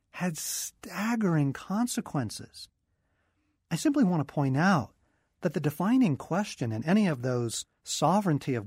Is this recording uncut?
yes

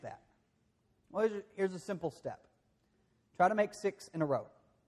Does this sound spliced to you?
no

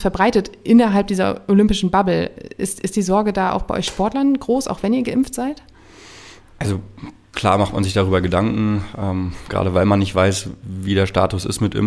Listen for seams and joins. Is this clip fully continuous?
no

